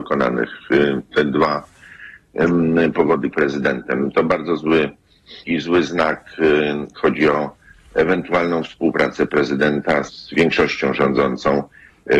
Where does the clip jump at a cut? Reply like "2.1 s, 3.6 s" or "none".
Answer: 3.3 s, 5.4 s, 6.9 s, 10.1 s